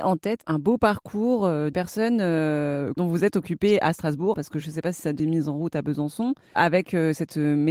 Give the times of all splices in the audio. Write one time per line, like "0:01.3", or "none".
0:01.7
0:04.3
0:05.2